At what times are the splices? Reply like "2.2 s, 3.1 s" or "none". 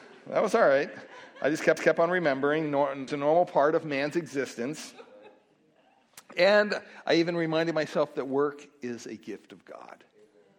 1.8 s, 3.1 s